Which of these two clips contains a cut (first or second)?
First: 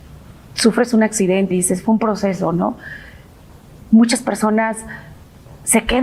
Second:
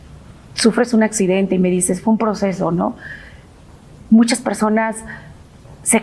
first